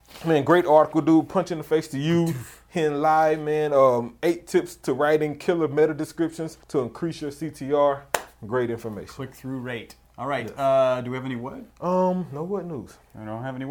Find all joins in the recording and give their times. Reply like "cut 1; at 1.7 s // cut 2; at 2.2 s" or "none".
cut 1; at 6.6 s // cut 2; at 10.0 s // cut 3; at 11.7 s

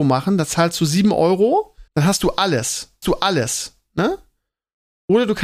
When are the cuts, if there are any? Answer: cut 1; at 1.9 s // cut 2; at 3.0 s

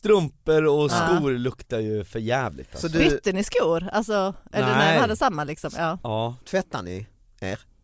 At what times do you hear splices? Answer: cut 1; at 6.4 s

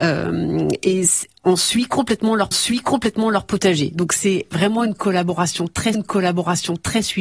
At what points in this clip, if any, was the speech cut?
cut 1; at 2.5 s // cut 2; at 5.9 s

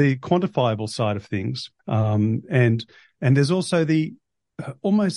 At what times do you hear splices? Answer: cut 1; at 1.8 s

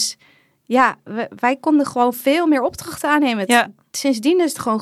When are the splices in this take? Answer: none

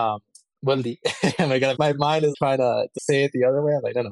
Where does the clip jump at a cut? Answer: cut 1; at 1.8 s // cut 2; at 2.3 s // cut 3; at 3.0 s

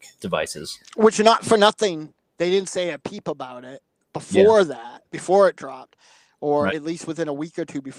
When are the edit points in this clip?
none

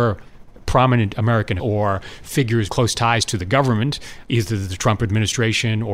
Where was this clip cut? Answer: cut 1; at 1.6 s // cut 2; at 2.7 s // cut 3; at 4.2 s

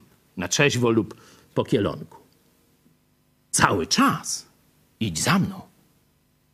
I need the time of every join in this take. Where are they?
none

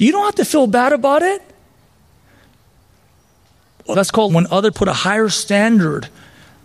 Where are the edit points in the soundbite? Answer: cut 1; at 3.9 s // cut 2; at 4.3 s // cut 3; at 4.7 s

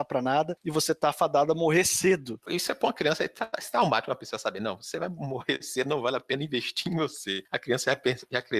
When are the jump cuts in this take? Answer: none

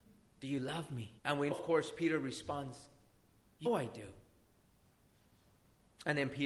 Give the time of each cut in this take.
cut 1; at 1.2 s // cut 2; at 1.5 s // cut 3; at 3.7 s

